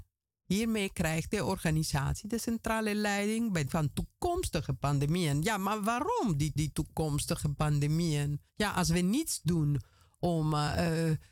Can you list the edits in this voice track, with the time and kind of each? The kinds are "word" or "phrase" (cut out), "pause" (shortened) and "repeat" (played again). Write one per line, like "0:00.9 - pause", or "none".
0:03.7 - word
0:06.6 - repeat
0:08.5 - pause